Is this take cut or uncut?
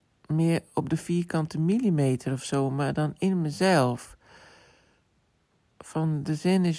uncut